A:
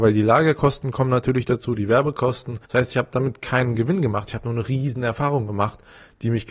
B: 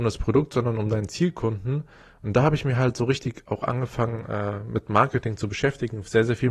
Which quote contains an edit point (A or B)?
A